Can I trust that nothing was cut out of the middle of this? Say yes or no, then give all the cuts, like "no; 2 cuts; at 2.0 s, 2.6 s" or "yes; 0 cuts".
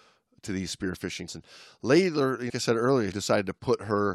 no; 3 cuts; at 1.3 s, 2.5 s, 3.1 s